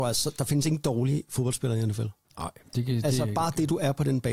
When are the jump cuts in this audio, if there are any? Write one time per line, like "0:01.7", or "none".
none